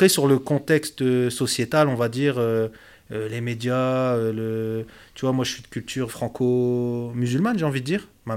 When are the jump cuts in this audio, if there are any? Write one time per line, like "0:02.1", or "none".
0:06.1